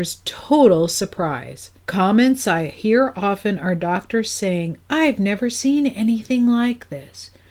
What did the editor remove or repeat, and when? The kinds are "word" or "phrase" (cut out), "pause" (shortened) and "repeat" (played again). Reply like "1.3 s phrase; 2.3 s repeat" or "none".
1.8 s pause